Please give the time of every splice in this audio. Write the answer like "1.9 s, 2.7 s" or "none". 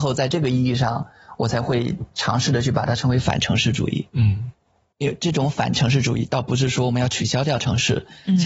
none